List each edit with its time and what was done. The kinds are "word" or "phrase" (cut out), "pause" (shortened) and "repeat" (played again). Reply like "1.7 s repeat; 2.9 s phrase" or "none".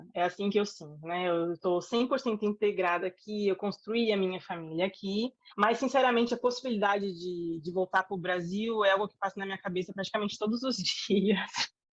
5.5 s pause